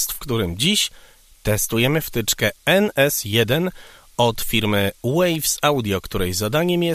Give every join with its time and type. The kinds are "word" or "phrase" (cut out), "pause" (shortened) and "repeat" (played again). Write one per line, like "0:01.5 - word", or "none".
none